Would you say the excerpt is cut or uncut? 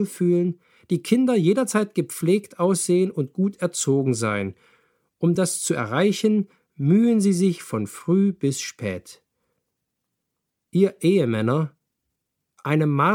uncut